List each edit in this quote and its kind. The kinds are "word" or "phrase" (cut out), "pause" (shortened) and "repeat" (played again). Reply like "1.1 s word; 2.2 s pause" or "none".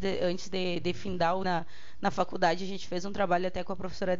1.4 s phrase